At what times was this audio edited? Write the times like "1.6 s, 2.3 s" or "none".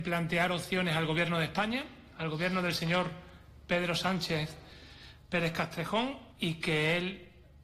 6.3 s